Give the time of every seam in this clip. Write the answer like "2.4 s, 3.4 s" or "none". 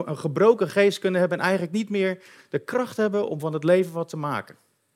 none